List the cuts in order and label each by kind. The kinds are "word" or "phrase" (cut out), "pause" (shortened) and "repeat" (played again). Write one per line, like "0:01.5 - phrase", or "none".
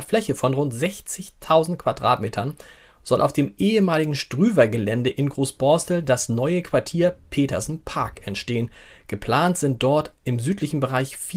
none